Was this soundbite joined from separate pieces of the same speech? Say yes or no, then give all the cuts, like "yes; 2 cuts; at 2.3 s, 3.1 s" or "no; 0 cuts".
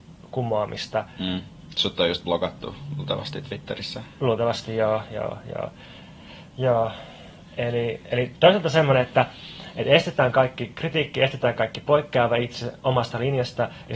no; 0 cuts